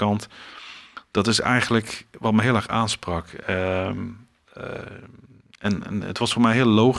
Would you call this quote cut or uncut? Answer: uncut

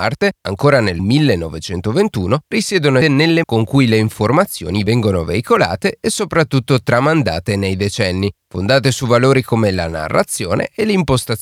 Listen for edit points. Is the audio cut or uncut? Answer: cut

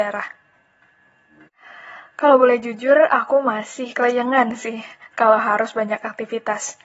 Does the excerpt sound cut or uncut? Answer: uncut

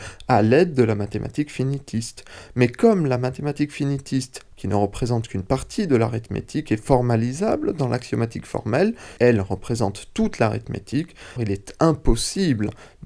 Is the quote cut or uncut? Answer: cut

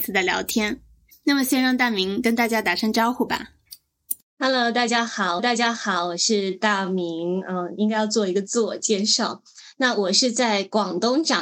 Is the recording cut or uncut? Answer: cut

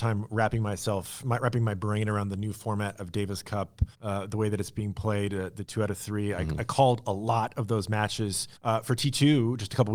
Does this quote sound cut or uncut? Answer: cut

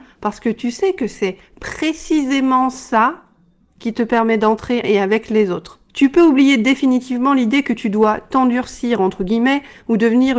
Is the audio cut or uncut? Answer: cut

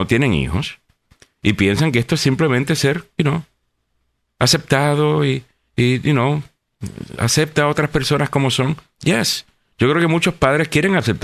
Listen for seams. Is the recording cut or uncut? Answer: uncut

